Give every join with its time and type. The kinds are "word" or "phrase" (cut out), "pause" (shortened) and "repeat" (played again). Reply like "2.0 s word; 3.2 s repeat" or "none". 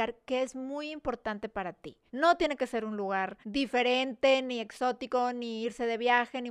2.1 s pause; 3.4 s pause